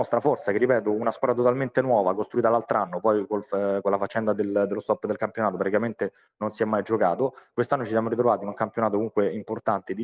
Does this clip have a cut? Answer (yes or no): no